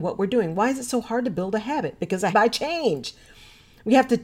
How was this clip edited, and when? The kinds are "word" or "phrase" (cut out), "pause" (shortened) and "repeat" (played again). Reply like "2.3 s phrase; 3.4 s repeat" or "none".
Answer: 2.3 s phrase